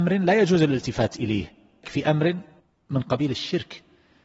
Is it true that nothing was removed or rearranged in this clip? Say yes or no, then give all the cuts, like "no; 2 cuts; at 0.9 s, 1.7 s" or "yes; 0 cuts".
no; 2 cuts; at 1.8 s, 2.6 s